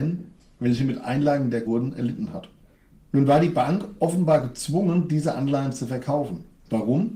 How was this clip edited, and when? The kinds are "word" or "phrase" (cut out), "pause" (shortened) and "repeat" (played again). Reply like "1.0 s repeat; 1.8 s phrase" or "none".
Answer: 1.7 s phrase; 2.7 s pause